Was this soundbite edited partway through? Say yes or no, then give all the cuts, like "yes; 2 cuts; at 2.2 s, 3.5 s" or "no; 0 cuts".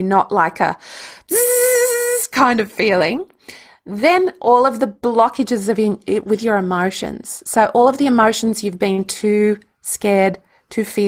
no; 0 cuts